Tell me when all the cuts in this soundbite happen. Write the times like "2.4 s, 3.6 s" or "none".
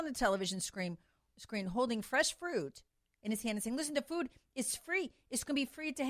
none